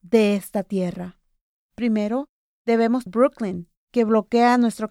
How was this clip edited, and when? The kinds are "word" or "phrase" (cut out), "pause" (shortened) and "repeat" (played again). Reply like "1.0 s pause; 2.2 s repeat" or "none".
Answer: 1.5 s pause; 3.1 s word; 3.8 s pause